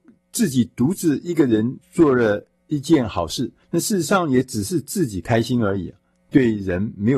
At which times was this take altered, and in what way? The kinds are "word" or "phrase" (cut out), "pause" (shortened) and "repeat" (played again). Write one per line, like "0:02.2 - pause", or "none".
0:01.8 - pause
0:03.6 - pause
0:06.1 - pause